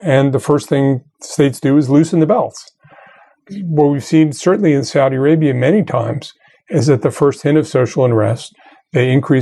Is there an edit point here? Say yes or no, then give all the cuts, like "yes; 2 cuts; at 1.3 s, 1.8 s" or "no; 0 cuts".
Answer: no; 0 cuts